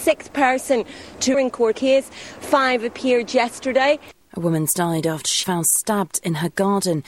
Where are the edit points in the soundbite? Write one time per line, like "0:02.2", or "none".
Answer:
0:01.3
0:01.7
0:05.4